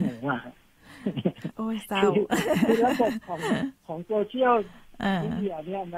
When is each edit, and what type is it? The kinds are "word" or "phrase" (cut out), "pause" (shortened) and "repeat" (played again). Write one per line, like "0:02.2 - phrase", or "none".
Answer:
0:03.8 - pause